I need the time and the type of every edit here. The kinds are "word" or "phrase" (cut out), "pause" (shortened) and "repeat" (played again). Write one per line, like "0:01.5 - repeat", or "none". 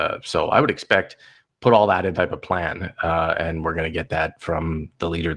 0:02.1 - word

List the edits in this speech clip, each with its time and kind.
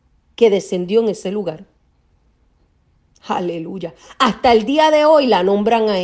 none

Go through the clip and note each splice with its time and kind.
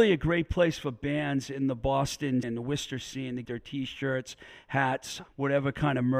0:02.4 - word
0:03.4 - word
0:05.3 - word

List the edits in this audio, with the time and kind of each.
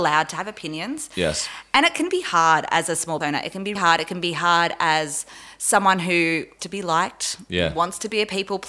0:03.2 - word
0:03.8 - word
0:06.6 - word

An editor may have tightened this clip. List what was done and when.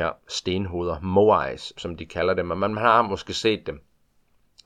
0:01.8 - word

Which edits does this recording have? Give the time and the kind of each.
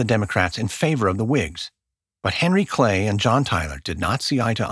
none

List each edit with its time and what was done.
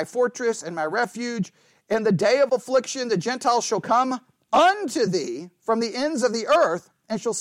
none

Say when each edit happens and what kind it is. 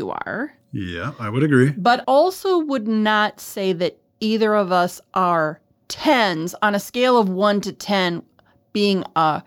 0:02.0 - word

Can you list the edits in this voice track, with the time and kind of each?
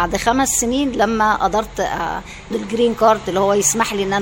0:02.5 - word

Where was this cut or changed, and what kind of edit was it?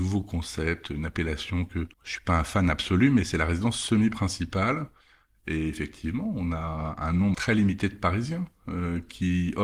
0:01.9 - pause
0:07.3 - word

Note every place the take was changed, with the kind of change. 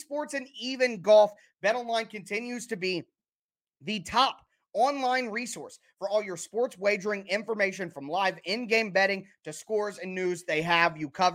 none

